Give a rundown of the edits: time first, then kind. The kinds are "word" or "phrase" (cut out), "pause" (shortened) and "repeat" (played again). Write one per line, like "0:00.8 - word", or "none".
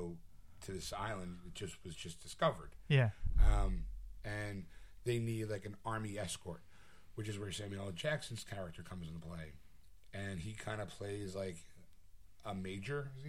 none